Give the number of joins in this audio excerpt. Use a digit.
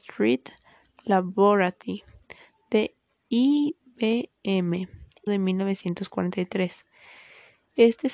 1